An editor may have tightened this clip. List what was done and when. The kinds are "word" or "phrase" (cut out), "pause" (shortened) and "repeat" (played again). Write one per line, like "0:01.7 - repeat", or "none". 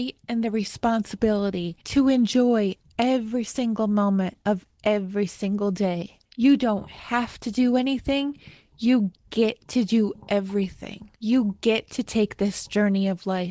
0:01.8 - pause
0:06.2 - pause
0:11.2 - pause